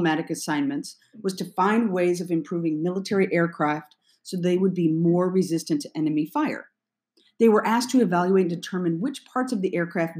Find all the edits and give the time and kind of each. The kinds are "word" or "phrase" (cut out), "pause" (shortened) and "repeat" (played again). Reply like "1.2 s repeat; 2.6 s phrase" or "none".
none